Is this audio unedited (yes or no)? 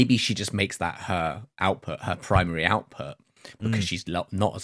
no